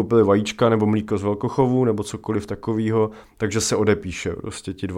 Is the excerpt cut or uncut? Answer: uncut